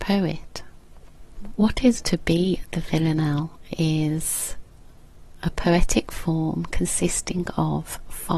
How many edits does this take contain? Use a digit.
1